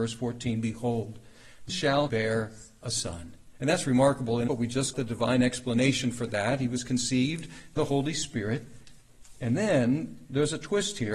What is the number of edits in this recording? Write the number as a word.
five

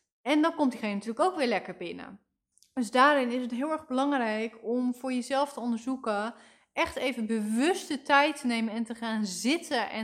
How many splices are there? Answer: one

